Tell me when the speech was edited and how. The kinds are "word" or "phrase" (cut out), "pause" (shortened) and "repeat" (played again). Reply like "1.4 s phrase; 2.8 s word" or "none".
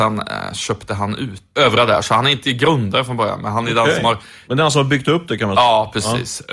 1.5 s word